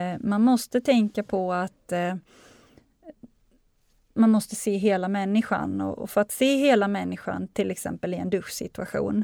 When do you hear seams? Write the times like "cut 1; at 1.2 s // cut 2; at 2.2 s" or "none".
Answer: none